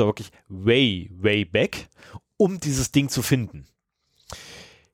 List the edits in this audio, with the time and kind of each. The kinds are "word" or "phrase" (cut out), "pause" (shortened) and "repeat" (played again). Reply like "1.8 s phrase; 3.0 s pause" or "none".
none